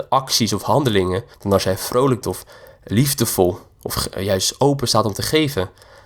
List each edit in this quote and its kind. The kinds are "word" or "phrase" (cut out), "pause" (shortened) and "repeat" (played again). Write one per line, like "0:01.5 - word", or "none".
0:01.3 - pause
0:02.2 - word